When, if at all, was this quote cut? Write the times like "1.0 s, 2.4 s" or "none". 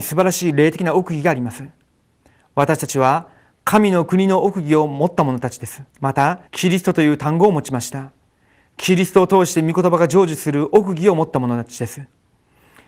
5.9 s, 6.5 s